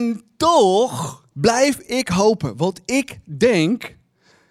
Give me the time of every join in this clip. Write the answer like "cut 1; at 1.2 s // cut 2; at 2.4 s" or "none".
cut 1; at 1.3 s